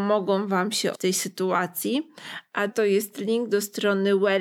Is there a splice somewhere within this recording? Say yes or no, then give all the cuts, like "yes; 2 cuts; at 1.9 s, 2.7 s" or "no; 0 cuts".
yes; 2 cuts; at 0.9 s, 2.7 s